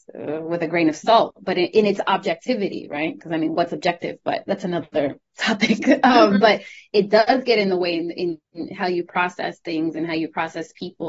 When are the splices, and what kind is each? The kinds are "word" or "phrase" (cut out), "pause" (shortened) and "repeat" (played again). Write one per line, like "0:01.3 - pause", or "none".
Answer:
none